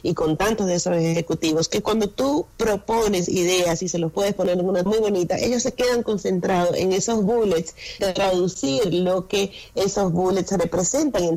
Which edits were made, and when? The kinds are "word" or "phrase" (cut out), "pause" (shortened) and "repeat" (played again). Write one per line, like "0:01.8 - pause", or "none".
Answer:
0:04.9 - word
0:08.0 - word